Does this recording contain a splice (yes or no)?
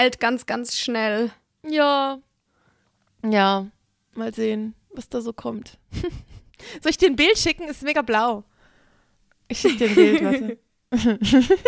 no